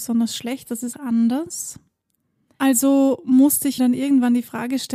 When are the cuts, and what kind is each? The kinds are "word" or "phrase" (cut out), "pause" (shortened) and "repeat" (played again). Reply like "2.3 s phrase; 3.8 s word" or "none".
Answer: 0.9 s word; 3.8 s word